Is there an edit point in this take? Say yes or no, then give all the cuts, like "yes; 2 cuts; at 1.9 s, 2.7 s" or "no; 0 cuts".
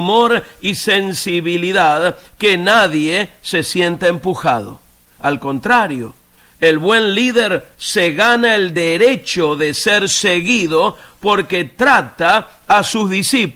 no; 0 cuts